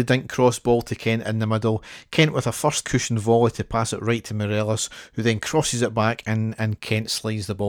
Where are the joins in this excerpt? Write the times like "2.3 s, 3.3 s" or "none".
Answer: 2.8 s